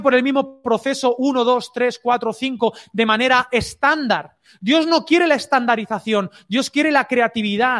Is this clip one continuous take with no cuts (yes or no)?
yes